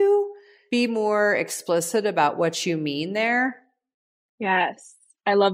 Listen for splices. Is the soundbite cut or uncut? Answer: uncut